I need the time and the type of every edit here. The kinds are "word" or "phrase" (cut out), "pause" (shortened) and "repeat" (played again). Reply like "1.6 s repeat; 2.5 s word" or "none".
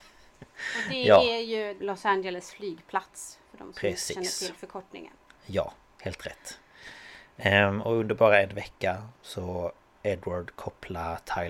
1.8 s phrase; 5.3 s pause; 9.9 s word